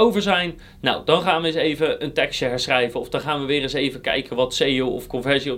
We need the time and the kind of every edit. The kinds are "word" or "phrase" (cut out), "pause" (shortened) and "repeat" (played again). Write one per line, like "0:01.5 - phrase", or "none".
none